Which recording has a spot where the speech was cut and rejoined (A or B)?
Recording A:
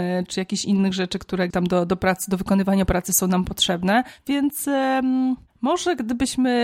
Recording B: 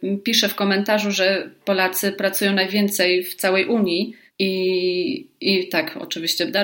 A